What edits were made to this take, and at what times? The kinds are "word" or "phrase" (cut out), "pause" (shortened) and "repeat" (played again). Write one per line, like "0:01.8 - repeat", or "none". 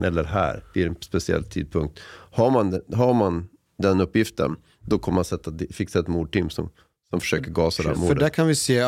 none